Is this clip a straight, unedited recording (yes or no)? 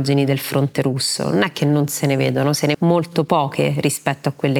no